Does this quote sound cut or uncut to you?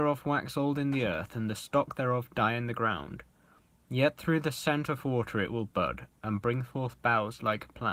uncut